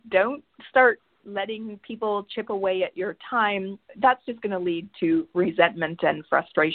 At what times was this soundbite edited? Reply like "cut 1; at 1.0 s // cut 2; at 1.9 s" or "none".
none